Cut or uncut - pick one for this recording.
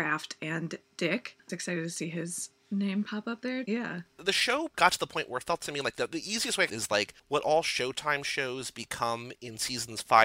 cut